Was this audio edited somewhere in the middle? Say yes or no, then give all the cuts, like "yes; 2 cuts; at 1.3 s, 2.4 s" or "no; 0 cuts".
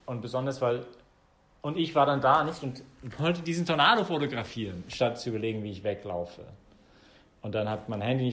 no; 0 cuts